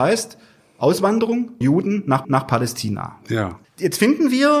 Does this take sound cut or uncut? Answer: cut